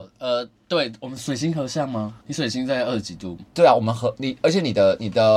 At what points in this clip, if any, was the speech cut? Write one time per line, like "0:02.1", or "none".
0:02.2
0:03.5